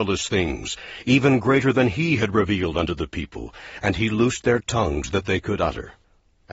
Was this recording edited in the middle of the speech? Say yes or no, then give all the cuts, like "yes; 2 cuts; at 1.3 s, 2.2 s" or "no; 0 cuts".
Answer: no; 0 cuts